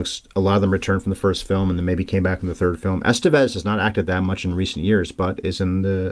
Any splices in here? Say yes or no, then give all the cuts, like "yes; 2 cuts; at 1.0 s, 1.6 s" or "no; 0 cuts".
no; 0 cuts